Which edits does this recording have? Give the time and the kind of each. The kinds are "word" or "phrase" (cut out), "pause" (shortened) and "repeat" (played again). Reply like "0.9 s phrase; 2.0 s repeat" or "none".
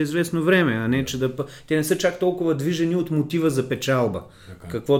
none